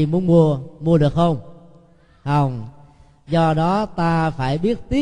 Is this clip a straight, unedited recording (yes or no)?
yes